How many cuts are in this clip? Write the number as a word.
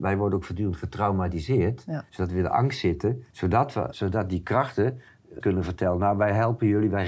four